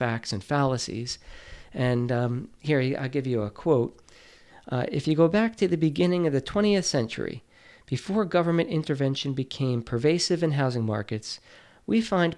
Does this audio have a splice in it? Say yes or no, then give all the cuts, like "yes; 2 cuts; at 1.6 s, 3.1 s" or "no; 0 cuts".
no; 0 cuts